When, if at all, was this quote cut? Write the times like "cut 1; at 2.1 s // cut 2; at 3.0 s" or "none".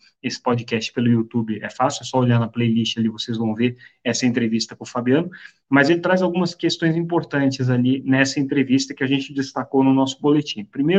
none